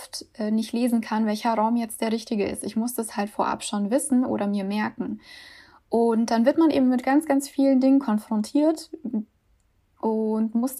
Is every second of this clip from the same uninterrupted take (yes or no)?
yes